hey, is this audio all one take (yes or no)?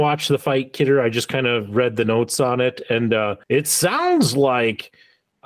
no